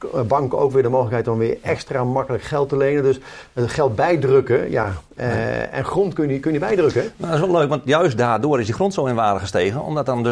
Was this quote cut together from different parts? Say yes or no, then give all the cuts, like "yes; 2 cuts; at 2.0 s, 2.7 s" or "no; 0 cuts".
no; 0 cuts